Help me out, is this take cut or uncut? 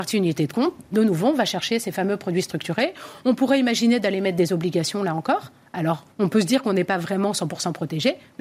cut